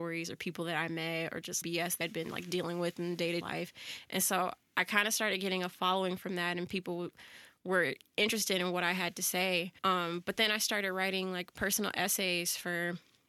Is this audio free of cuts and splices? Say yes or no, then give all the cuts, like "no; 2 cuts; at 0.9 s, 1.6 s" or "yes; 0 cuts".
no; 4 cuts; at 1.6 s, 2.0 s, 3.4 s, 9.8 s